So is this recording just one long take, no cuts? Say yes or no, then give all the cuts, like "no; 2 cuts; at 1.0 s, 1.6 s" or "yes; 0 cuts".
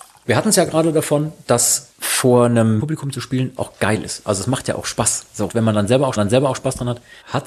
no; 4 cuts; at 2.8 s, 3.6 s, 5.5 s, 6.2 s